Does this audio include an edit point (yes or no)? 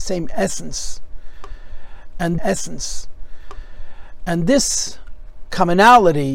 yes